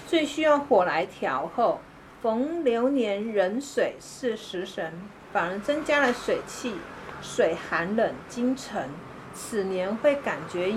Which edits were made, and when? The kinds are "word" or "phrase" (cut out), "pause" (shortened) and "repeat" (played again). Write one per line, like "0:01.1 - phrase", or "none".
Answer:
none